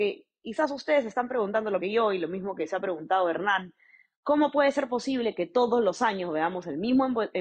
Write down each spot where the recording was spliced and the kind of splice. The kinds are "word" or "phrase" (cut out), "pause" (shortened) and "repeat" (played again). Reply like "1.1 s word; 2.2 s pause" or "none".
1.8 s word